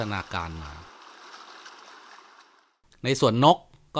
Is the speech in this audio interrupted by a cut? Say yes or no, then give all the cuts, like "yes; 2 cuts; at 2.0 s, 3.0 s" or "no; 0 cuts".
no; 0 cuts